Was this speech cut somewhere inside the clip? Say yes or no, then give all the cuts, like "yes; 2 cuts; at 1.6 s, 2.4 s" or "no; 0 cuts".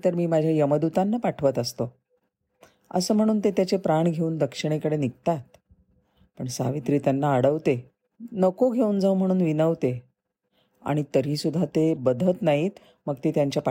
no; 0 cuts